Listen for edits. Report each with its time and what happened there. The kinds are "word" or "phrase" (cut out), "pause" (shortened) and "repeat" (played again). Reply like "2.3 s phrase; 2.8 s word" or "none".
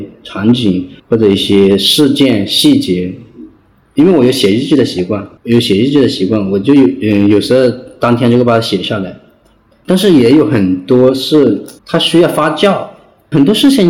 1.0 s pause; 5.4 s pause; 11.8 s pause

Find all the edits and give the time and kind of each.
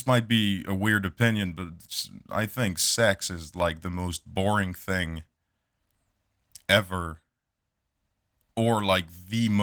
none

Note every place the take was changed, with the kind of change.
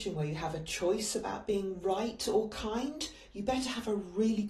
none

